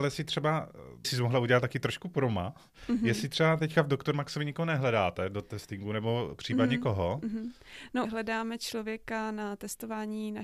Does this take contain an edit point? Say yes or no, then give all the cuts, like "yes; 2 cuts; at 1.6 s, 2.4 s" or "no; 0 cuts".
yes; 2 cuts; at 1.0 s, 8.0 s